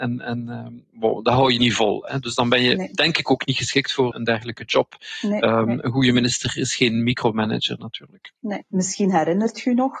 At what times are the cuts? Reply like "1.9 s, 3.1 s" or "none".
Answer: 4.1 s, 8.7 s